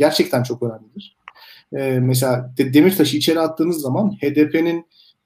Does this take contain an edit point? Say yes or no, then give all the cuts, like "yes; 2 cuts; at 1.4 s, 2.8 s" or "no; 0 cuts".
no; 0 cuts